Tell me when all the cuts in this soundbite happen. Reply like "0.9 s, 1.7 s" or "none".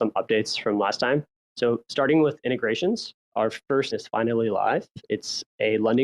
1.4 s, 3.2 s, 3.9 s